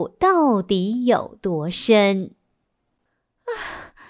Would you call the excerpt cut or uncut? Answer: uncut